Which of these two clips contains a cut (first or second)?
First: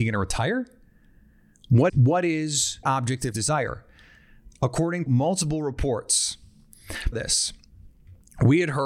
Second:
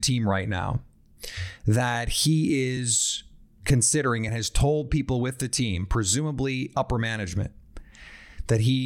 first